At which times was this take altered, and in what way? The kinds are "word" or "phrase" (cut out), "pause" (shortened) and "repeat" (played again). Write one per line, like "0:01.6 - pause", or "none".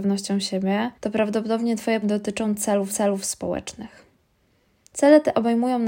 0:00.9 - pause
0:02.0 - word
0:02.9 - repeat